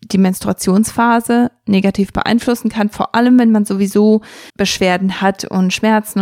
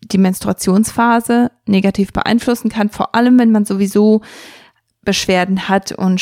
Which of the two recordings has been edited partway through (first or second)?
first